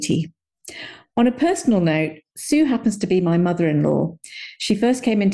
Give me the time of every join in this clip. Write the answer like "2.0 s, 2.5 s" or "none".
none